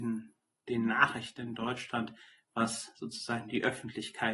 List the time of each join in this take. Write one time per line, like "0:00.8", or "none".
none

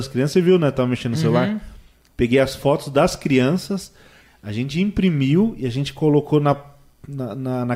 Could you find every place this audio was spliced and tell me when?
none

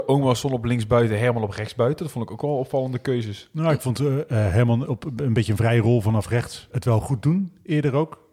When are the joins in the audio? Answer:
0:06.7

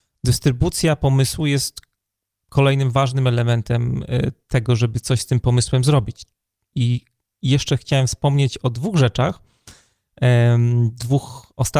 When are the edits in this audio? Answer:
none

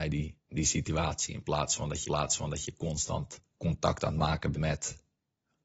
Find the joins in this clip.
0:02.1
0:03.4
0:04.5

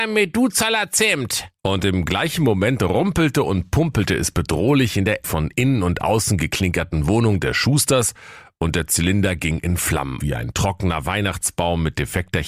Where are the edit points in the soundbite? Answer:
0:01.6
0:05.2
0:10.2

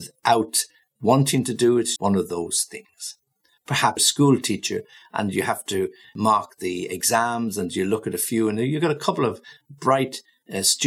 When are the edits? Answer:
0:02.0
0:04.0

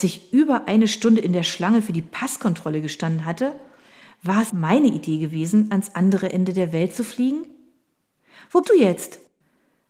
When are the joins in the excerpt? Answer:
0:04.5
0:08.6

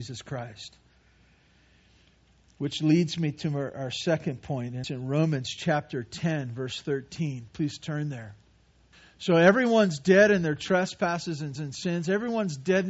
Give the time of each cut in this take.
0:04.8
0:08.9
0:11.6

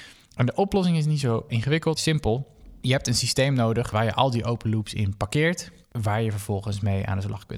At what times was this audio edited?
0:02.0
0:05.8

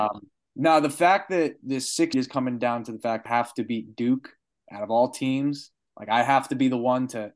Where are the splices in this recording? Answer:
0:01.6
0:02.1
0:03.3

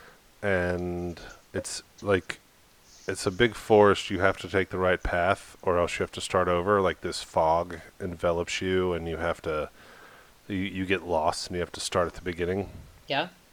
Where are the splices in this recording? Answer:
none

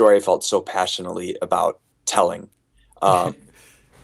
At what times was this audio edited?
0:01.9

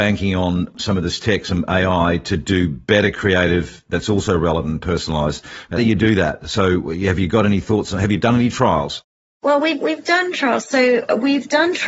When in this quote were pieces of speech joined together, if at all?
0:05.8

